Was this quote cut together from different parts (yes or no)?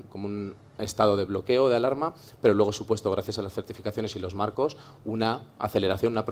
no